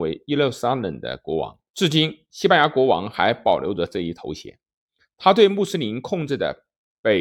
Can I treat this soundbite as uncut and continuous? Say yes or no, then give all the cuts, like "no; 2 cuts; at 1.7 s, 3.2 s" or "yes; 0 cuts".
no; 1 cut; at 1.7 s